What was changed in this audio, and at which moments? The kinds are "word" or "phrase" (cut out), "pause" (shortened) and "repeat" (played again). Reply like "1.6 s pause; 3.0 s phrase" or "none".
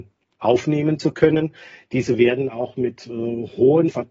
none